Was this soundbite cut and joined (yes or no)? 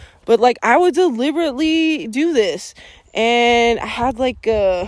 no